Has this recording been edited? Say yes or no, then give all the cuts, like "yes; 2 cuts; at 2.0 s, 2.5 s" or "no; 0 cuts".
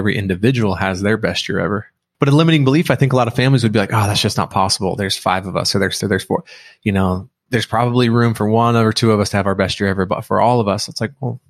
yes; 1 cut; at 6.0 s